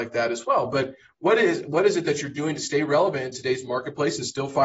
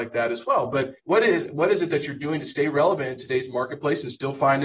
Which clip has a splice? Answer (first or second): second